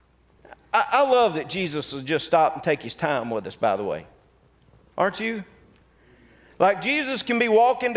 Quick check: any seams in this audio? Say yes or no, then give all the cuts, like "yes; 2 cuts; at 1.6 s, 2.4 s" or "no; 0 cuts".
no; 0 cuts